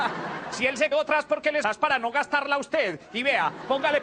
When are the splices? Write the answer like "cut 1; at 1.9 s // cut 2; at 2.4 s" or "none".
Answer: cut 1; at 0.9 s // cut 2; at 1.6 s